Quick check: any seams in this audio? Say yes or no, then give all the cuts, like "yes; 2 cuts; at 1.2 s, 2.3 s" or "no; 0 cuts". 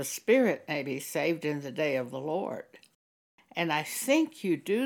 no; 0 cuts